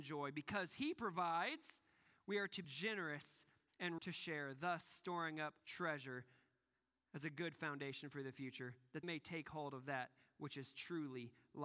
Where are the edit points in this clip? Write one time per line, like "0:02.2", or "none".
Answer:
0:02.6
0:04.0
0:05.6
0:09.0